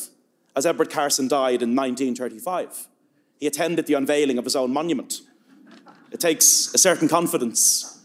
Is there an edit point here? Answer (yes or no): no